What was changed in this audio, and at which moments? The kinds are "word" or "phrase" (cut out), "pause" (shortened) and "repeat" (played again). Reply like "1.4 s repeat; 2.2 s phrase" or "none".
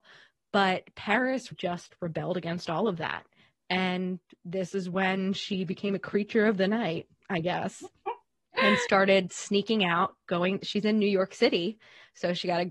1.5 s word